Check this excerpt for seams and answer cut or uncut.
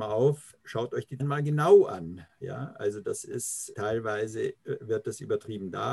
cut